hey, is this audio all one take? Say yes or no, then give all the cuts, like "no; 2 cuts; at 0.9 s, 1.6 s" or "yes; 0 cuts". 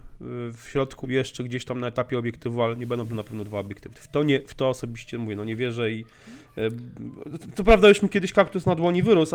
no; 1 cut; at 1.0 s